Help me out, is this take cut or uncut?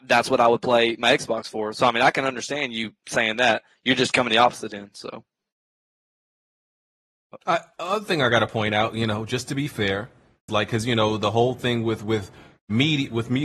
cut